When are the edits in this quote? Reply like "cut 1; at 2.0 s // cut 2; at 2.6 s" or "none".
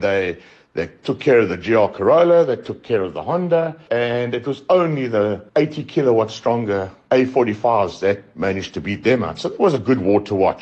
cut 1; at 5.5 s